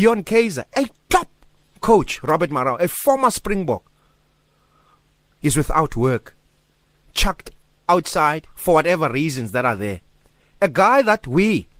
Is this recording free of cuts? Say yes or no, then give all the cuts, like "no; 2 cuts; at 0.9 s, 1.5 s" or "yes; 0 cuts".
yes; 0 cuts